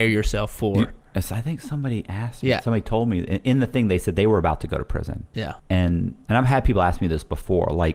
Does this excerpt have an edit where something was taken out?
yes; 1 cut; at 5.6 s

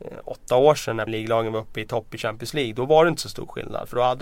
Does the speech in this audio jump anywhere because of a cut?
yes; 1 cut; at 1.1 s

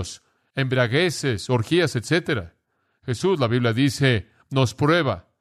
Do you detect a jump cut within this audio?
no; 0 cuts

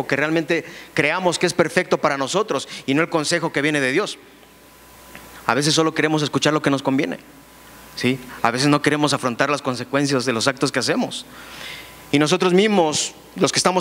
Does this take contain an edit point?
no; 0 cuts

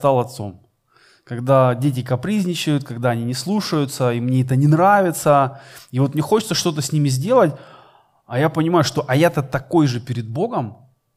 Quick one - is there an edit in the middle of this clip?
no; 0 cuts

